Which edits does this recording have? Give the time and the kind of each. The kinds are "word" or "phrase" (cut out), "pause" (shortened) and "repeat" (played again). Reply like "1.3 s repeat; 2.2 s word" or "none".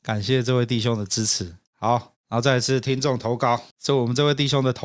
3.7 s word